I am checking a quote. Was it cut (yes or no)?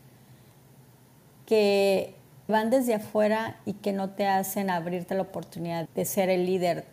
yes